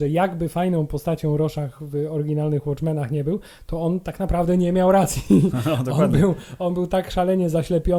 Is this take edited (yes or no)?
no